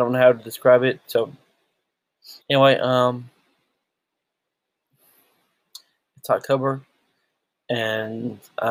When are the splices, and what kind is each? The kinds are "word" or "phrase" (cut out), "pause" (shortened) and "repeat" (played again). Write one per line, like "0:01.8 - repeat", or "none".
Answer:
0:02.4 - pause